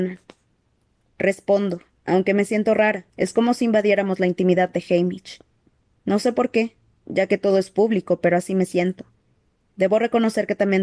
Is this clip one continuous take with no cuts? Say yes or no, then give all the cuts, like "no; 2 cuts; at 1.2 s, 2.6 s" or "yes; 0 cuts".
no; 1 cut; at 3.1 s